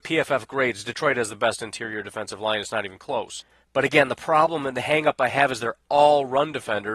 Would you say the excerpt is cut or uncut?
uncut